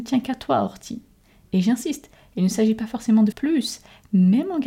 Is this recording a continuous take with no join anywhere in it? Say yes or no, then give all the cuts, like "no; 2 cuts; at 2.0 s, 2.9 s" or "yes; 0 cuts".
no; 1 cut; at 3.3 s